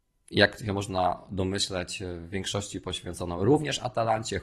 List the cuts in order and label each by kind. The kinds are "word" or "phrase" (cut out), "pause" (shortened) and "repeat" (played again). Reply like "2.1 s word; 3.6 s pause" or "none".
none